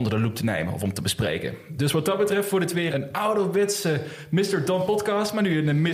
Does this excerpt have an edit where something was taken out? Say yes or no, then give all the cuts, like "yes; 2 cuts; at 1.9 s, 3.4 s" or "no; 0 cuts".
yes; 1 cut; at 2.9 s